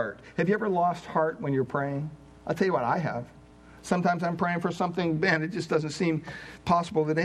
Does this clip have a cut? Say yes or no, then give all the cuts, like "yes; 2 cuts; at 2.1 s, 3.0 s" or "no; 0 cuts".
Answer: no; 0 cuts